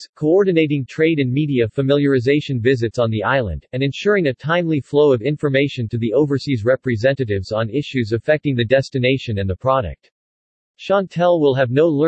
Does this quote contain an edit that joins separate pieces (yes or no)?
no